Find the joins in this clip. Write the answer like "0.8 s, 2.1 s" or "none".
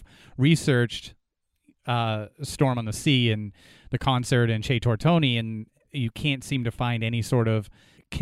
none